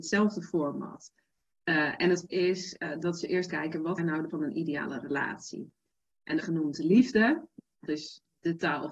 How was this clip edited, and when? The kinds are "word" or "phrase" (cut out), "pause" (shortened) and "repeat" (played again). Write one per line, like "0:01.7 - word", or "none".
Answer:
0:02.3 - word
0:03.5 - word
0:04.0 - word
0:04.3 - word
0:06.4 - word
0:07.9 - word